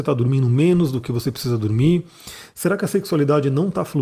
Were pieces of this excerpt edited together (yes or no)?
no